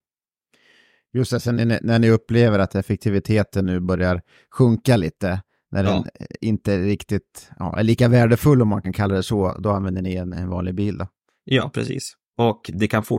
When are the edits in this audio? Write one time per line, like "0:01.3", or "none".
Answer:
none